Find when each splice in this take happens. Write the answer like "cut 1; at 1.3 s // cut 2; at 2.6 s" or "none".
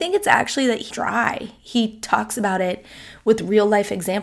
cut 1; at 0.9 s